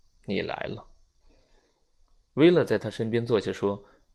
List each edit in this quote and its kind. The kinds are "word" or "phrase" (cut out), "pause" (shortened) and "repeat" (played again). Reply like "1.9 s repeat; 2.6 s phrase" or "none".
none

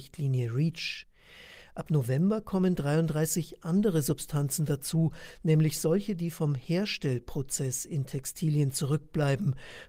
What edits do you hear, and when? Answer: none

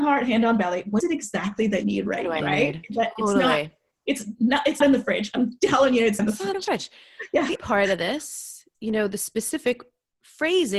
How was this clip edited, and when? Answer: 1.0 s word; 1.8 s word; 2.4 s word; 4.8 s word; 6.2 s word; 6.5 s word; 7.6 s word; 8.7 s word

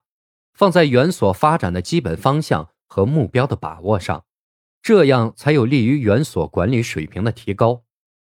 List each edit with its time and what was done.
none

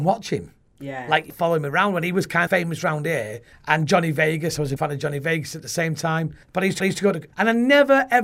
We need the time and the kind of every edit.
1.3 s word; 2.5 s word; 3.5 s pause; 4.8 s word; 6.4 s pause; 6.8 s repeat; 7.3 s pause

